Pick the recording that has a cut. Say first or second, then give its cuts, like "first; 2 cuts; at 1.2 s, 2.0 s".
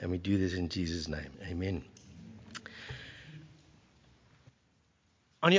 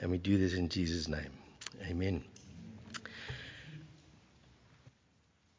first; 1 cut; at 1.3 s